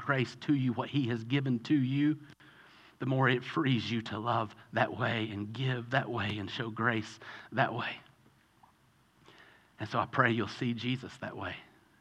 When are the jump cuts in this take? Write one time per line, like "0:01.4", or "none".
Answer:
none